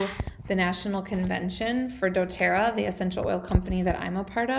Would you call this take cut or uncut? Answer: uncut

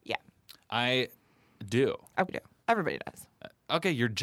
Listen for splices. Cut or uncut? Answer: cut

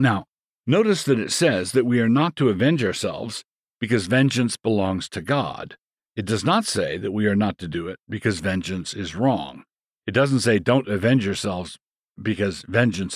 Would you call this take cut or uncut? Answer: uncut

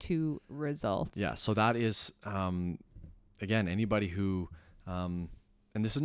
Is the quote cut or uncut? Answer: uncut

